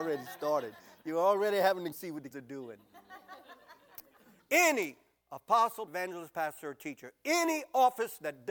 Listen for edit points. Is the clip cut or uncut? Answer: cut